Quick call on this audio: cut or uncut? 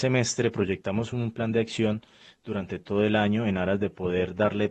uncut